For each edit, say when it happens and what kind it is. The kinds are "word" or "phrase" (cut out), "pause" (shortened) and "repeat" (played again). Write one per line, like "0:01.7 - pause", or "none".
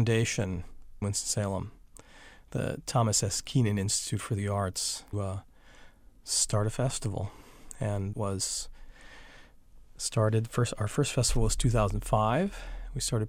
0:01.0 - word
0:05.1 - word
0:08.1 - word

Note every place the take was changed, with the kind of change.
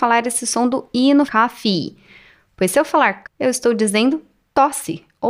0:01.3 - word
0:03.2 - word

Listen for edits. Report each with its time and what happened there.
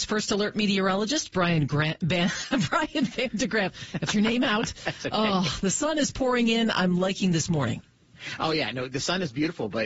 0:04.1 - phrase

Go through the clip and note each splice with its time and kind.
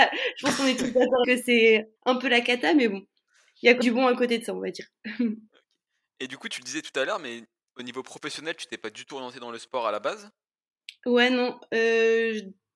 0:01.2 - word
0:02.0 - pause
0:03.8 - word

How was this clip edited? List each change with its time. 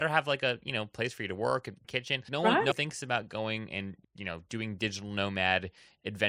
0:01.8 - phrase
0:02.3 - word
0:02.7 - word
0:04.0 - pause

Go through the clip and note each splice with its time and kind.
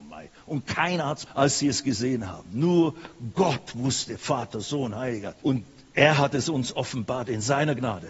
0:01.3 - word
0:05.4 - pause

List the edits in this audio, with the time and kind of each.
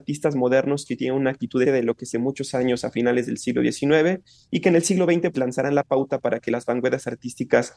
0:01.6 - phrase
0:02.1 - phrase
0:04.3 - pause
0:05.3 - word

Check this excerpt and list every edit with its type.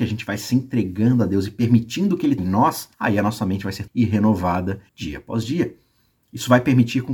0:02.4 - word
0:02.9 - pause
0:03.9 - word
0:04.9 - pause

